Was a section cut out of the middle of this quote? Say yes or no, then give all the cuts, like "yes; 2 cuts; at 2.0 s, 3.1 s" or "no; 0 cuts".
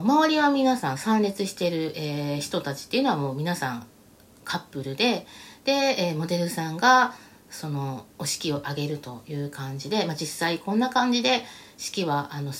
no; 0 cuts